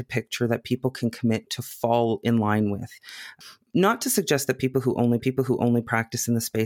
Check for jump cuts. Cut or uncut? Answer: cut